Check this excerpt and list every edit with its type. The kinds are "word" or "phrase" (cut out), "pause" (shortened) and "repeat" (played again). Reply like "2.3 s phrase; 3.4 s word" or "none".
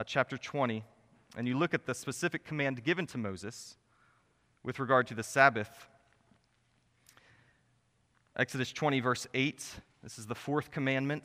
none